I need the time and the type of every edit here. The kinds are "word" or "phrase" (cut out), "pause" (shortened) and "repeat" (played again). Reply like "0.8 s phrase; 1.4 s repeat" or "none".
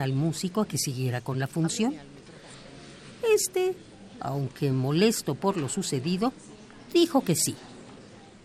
none